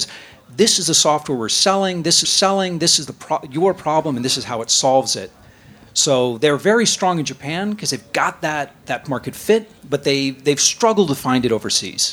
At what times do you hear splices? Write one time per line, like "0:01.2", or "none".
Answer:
0:02.2
0:09.0
0:09.8